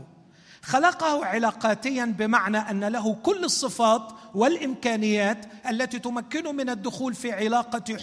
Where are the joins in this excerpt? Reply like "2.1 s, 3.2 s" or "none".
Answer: none